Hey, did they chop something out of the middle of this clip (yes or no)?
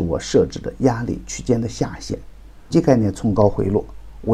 yes